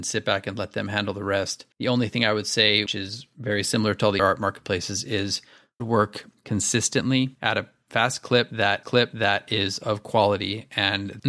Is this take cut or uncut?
cut